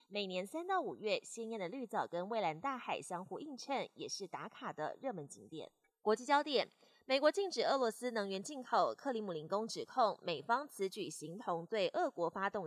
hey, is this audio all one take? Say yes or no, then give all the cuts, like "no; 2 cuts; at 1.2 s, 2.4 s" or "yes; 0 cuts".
yes; 0 cuts